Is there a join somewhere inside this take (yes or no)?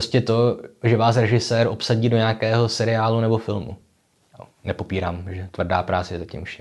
no